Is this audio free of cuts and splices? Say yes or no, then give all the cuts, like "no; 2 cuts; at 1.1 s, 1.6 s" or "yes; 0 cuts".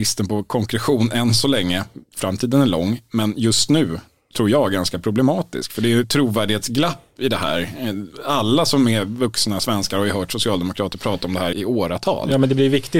no; 2 cuts; at 6.0 s, 11.5 s